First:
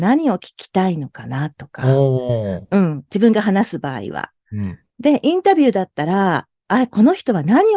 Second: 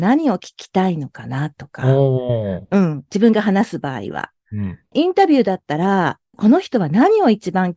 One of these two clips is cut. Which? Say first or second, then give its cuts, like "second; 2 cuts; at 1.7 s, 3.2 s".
second; 2 cuts; at 4.9 s, 6.3 s